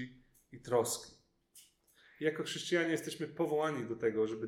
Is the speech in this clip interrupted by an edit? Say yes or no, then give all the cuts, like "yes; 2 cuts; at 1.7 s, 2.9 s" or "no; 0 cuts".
no; 0 cuts